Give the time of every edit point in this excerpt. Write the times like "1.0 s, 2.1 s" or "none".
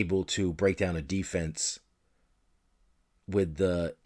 none